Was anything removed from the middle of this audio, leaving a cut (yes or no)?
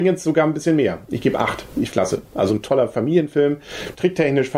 yes